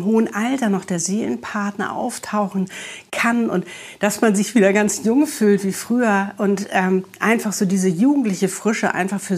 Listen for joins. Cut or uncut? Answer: uncut